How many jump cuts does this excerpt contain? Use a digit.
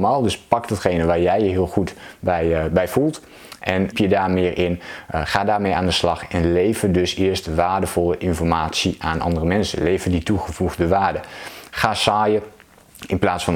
1